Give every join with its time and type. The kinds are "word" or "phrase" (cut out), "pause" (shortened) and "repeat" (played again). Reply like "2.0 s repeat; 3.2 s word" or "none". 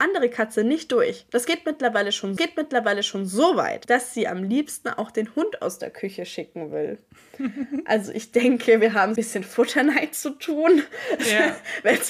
2.4 s repeat; 9.2 s phrase